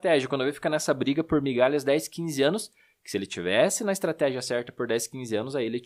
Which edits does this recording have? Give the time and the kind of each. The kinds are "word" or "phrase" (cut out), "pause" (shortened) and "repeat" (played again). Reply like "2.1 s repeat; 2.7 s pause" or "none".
none